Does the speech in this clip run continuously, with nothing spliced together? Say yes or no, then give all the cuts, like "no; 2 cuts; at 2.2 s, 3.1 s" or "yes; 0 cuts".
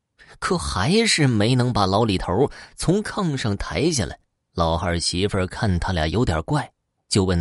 yes; 0 cuts